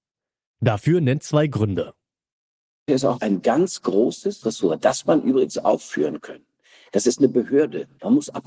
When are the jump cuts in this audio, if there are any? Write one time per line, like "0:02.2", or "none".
0:01.2
0:02.9
0:04.4
0:05.0